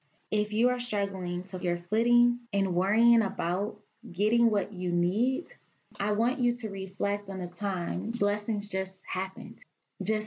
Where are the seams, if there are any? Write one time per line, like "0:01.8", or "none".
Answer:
0:01.6
0:02.5